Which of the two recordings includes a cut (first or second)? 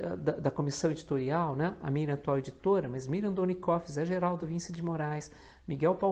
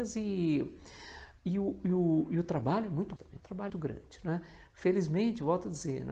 second